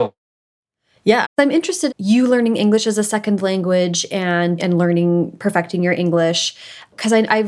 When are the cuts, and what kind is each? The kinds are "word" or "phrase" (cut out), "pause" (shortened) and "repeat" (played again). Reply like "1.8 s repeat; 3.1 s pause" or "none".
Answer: 1.2 s word; 1.9 s word; 4.6 s word